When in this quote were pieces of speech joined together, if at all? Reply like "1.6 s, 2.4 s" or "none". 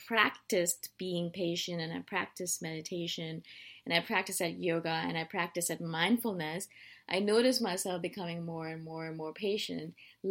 none